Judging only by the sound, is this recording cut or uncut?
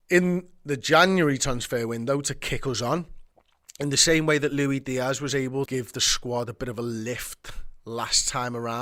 cut